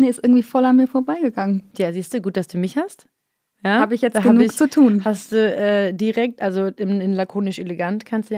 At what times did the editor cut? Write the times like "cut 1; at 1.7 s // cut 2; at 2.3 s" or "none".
none